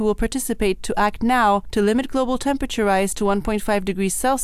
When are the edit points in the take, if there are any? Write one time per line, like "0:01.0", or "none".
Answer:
none